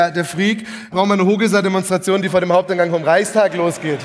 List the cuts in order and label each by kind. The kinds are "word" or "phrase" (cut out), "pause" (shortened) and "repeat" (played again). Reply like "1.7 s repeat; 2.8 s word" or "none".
0.9 s word

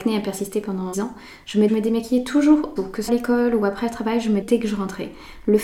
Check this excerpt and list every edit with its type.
0.9 s word; 1.7 s word; 2.8 s word; 3.1 s word; 4.4 s word

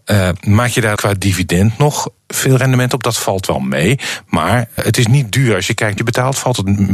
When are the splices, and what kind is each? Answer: 1.0 s word; 2.2 s pause; 4.8 s word; 6.0 s phrase

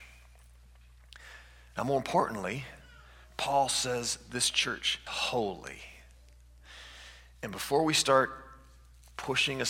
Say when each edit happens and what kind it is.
5.1 s word

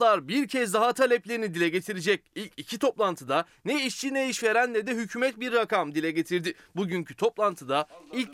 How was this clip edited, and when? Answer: none

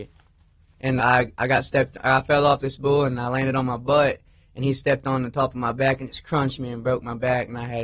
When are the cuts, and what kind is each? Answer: 1.0 s word

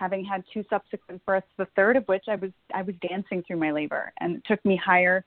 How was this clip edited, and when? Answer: none

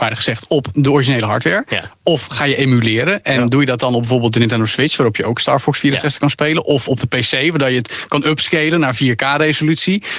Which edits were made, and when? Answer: none

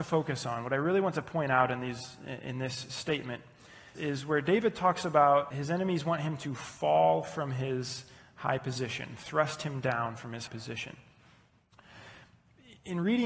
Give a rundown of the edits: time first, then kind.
4.0 s word; 5.5 s word; 10.5 s word

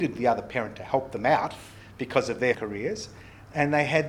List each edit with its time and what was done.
2.5 s word

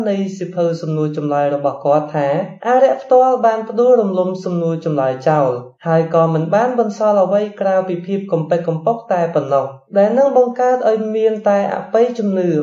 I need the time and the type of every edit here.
2.6 s pause; 5.7 s pause; 9.9 s pause

